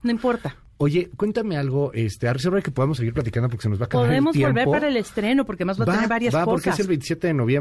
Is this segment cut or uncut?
uncut